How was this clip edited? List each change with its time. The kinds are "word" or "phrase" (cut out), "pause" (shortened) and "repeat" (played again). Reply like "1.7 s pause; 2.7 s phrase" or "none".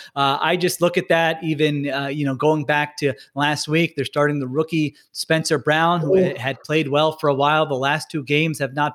none